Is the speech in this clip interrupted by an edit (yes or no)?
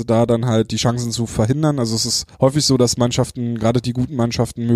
yes